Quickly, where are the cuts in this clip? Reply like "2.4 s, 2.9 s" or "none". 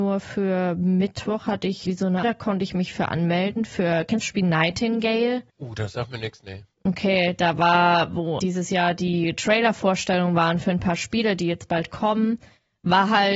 1.9 s, 2.2 s, 4.2 s, 5.5 s, 8.4 s